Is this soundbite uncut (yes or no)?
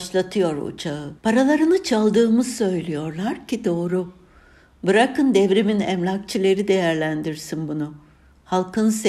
no